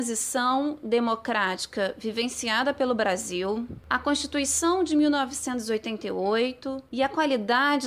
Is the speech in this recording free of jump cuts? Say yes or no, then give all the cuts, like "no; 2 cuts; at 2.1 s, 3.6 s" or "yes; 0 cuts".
yes; 0 cuts